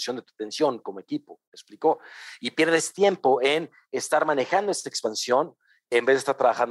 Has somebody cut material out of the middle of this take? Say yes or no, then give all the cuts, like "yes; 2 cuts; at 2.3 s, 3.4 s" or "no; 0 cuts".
no; 0 cuts